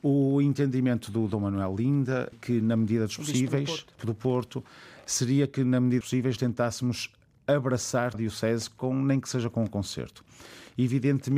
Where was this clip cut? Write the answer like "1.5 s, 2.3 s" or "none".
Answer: 2.3 s, 4.0 s, 6.0 s, 6.4 s, 8.1 s